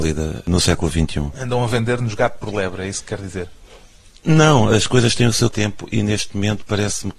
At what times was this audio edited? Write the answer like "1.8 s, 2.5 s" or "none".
none